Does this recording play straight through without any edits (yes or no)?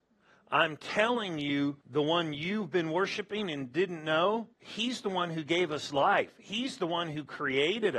no